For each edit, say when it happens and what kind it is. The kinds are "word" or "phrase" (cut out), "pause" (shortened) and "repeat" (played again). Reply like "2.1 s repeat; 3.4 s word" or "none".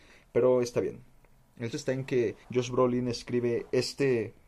1.7 s word; 2.4 s pause